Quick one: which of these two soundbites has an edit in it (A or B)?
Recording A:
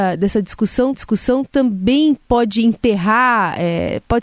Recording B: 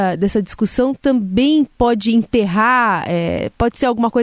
A